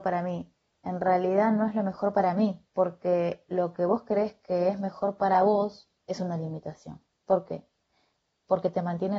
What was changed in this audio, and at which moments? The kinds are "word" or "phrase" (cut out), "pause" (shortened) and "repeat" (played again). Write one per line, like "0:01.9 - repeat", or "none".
0:02.7 - pause
0:06.0 - pause
0:07.1 - pause